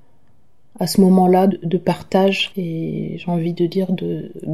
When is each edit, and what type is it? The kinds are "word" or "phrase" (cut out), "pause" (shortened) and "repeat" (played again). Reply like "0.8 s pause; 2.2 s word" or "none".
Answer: 1.5 s word; 2.5 s word